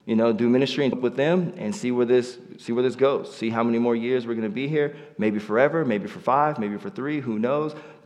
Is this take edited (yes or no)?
yes